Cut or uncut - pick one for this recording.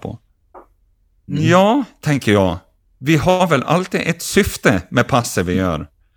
uncut